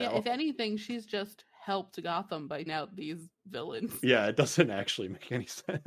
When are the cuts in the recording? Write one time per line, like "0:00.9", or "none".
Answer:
0:02.7